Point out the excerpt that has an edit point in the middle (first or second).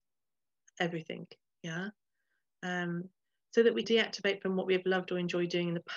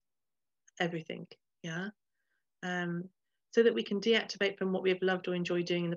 first